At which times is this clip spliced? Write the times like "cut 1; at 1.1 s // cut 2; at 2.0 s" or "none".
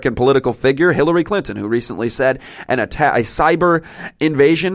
none